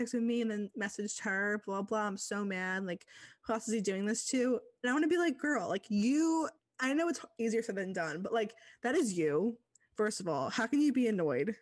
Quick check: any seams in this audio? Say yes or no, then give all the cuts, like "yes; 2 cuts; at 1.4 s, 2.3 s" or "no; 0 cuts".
yes; 1 cut; at 6.6 s